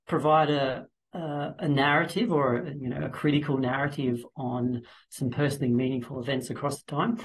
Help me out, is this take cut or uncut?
uncut